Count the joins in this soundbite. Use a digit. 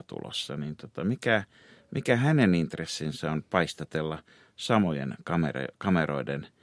0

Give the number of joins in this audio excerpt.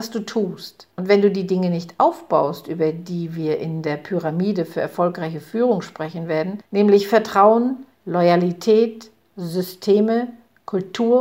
2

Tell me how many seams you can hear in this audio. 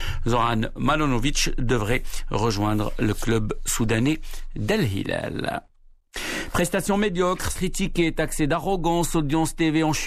1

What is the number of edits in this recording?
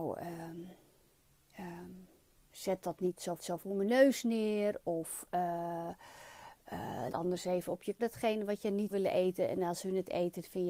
5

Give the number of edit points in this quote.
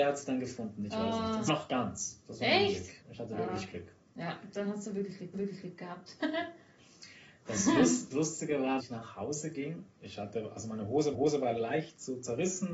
8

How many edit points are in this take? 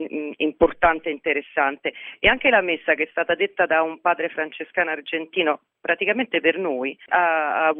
0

